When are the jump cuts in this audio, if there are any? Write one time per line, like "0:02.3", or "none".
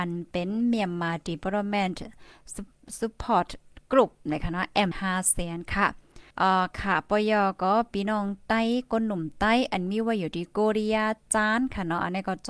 0:04.9
0:06.3